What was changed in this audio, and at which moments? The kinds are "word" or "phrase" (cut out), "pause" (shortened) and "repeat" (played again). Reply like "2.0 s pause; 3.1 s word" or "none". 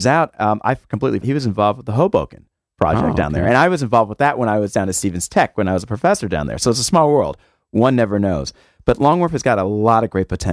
1.2 s word